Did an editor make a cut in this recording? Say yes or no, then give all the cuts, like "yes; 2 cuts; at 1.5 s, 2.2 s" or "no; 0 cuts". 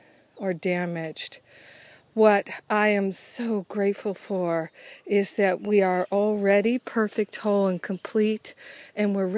no; 0 cuts